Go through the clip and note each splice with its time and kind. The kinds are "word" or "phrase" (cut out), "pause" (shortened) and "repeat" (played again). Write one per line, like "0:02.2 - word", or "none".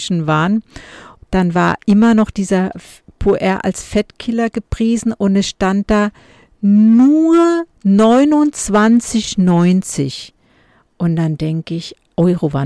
0:01.2 - word
0:07.7 - pause